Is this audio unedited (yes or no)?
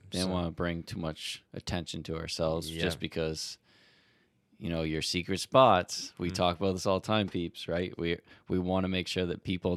yes